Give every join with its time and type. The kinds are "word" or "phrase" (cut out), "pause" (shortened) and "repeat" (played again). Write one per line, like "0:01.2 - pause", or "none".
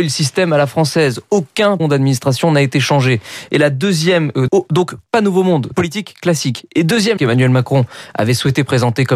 0:01.8 - word
0:04.5 - word
0:05.7 - word
0:07.2 - word